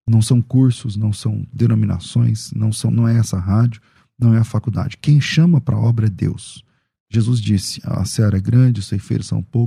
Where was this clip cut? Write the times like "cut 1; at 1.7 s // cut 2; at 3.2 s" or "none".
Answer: none